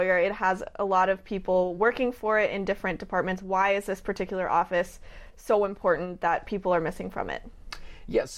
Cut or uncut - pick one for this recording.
uncut